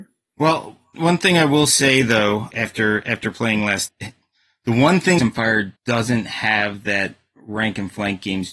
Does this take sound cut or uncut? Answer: cut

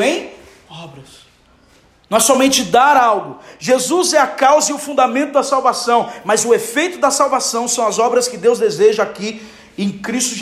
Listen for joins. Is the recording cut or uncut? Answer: uncut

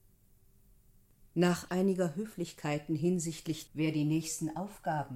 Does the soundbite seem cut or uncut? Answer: cut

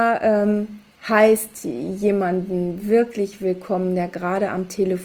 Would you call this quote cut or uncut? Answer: uncut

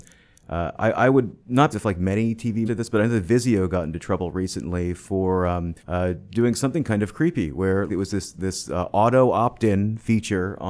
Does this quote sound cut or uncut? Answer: cut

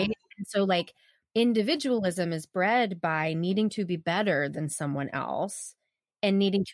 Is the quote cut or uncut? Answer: uncut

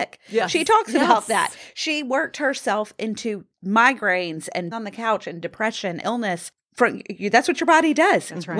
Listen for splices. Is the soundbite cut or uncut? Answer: cut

